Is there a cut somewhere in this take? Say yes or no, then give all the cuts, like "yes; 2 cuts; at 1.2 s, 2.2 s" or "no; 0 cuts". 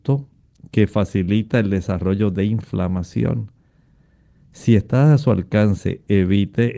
no; 0 cuts